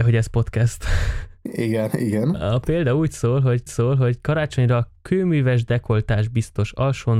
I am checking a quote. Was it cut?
yes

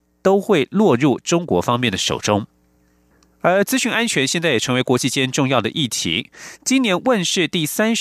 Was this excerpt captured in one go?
no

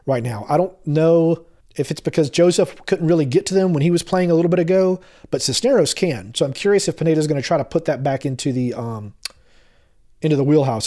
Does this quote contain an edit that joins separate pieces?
yes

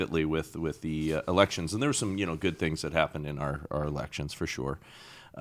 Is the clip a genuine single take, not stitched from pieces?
yes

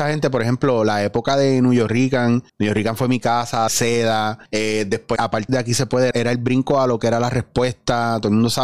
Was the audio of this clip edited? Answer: yes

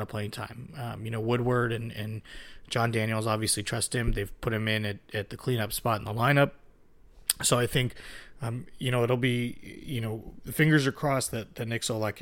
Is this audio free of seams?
yes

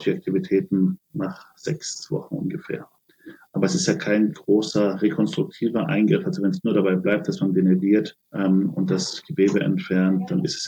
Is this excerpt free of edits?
no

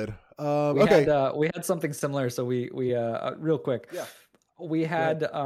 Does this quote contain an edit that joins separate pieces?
no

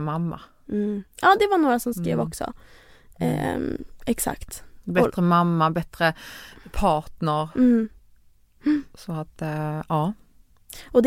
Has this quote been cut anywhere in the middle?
no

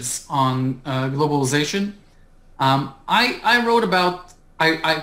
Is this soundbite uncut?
yes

